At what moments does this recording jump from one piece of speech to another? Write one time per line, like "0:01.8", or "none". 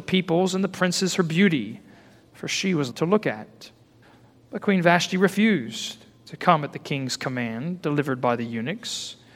0:02.9